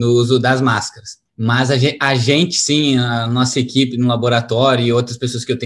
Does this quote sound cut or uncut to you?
cut